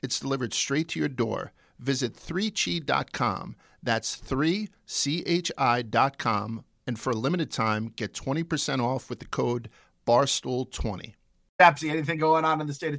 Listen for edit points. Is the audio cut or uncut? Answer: uncut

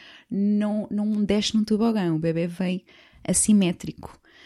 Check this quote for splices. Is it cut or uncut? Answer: uncut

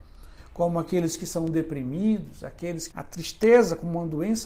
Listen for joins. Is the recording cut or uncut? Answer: cut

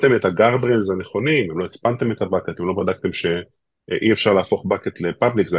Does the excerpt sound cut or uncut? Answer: uncut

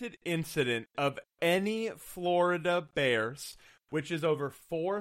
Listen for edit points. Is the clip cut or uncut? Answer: uncut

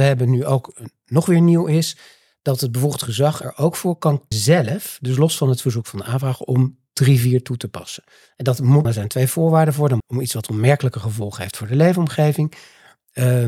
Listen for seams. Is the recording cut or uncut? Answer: cut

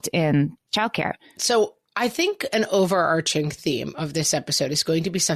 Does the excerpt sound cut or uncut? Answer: uncut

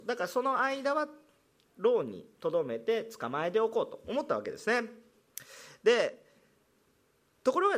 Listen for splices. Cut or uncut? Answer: uncut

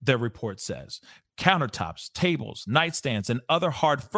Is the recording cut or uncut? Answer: uncut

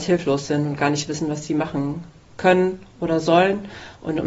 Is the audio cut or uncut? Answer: uncut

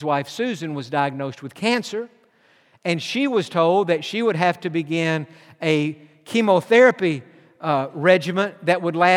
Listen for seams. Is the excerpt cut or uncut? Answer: uncut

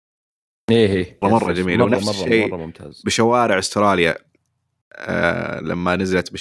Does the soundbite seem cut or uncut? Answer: cut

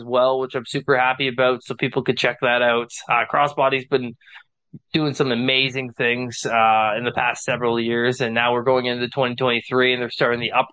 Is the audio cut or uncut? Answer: uncut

